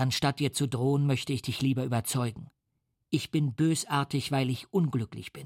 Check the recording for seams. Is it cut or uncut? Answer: uncut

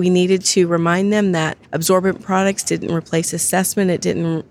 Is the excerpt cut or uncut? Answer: cut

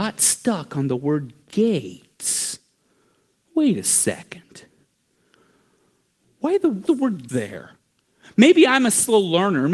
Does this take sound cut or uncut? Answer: cut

